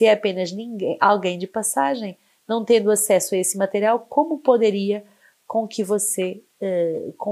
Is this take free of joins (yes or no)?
yes